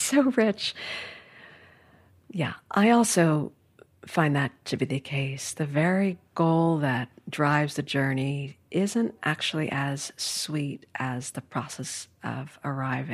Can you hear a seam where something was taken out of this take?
no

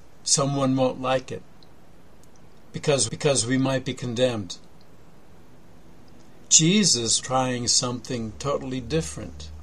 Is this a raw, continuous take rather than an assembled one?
no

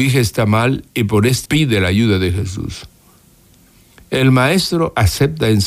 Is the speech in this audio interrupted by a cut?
yes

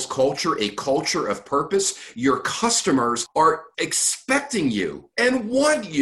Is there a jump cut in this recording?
no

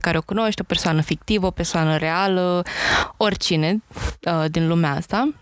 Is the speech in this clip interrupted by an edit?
no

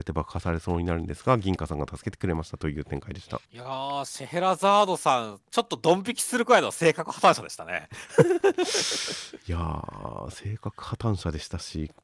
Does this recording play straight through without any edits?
no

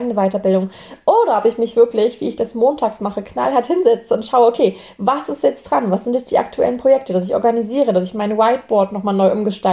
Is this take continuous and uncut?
yes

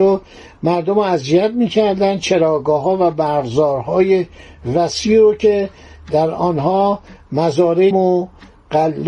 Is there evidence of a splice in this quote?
yes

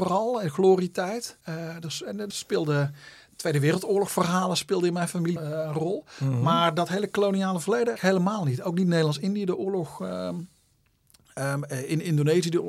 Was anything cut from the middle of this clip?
yes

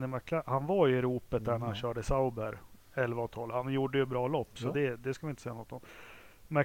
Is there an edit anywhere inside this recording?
no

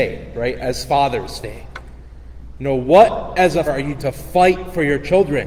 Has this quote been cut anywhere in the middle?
yes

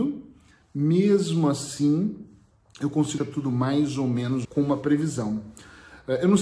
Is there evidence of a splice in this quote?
yes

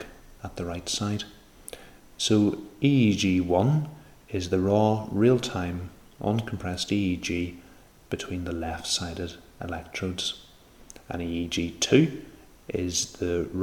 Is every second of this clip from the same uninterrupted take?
yes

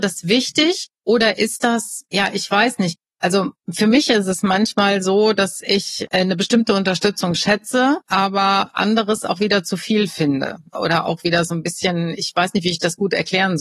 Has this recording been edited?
yes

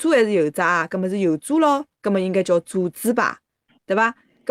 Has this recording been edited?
no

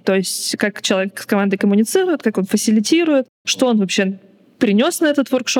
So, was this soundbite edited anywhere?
no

